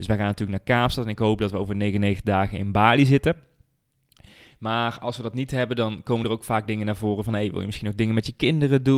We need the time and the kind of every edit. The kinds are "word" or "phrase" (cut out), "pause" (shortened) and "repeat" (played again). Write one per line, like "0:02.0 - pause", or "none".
none